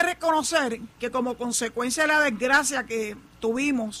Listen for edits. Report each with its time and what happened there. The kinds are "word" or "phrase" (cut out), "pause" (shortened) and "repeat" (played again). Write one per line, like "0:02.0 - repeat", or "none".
0:00.9 - pause